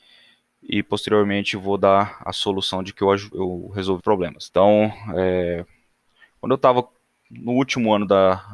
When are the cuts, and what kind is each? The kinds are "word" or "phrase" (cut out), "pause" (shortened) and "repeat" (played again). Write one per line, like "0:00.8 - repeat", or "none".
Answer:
0:02.9 - word
0:03.3 - word
0:04.0 - word
0:04.5 - word